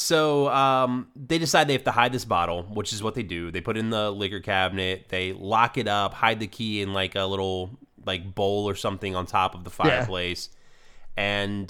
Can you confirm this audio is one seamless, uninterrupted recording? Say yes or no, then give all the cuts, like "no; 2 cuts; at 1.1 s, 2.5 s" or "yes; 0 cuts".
yes; 0 cuts